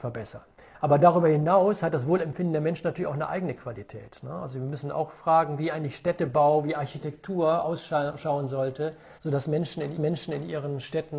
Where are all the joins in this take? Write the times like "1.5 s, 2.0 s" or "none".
9.2 s, 10.0 s